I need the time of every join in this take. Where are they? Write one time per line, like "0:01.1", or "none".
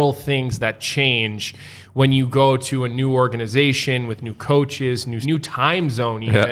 0:05.2